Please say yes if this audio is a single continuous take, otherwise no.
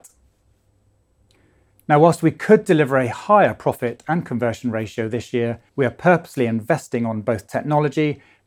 no